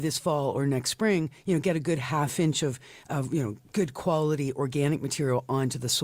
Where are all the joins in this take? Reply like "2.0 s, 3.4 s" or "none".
none